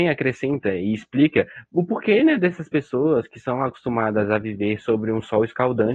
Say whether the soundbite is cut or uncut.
uncut